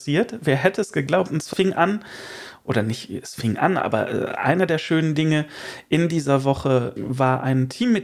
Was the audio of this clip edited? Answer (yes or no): yes